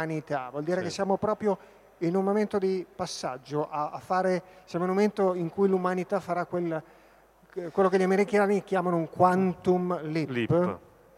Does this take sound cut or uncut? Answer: uncut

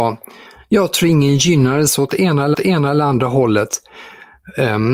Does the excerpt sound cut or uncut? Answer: cut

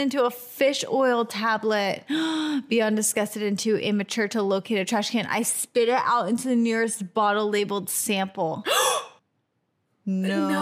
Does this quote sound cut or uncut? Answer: cut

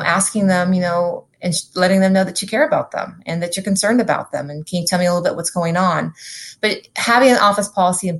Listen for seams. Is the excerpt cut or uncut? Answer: uncut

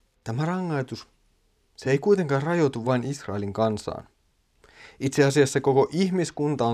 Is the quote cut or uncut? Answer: uncut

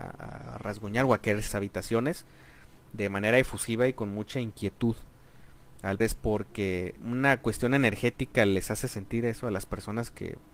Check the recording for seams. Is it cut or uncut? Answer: cut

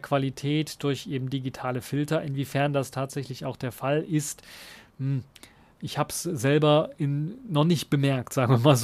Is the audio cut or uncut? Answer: uncut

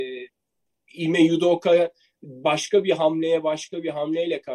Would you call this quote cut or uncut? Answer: uncut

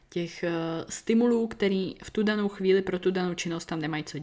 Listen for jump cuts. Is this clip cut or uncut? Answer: uncut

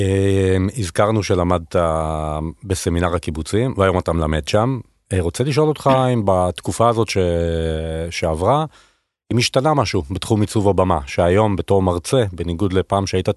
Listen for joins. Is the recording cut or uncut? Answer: uncut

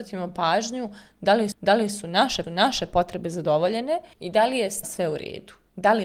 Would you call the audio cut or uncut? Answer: cut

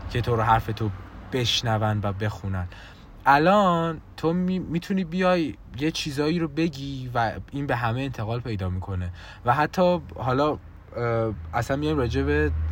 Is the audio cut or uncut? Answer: uncut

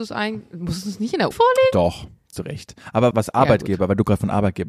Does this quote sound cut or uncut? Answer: cut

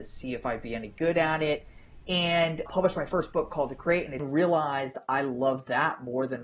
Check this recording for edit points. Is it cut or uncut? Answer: cut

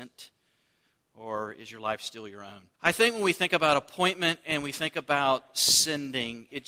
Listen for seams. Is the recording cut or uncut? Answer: cut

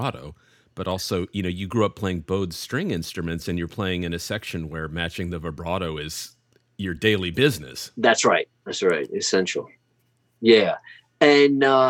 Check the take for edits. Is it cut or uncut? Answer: uncut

